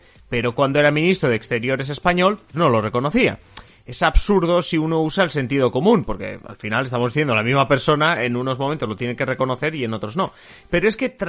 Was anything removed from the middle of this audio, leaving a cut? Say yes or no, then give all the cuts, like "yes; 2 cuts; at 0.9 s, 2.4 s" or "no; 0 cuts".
yes; 1 cut; at 2.5 s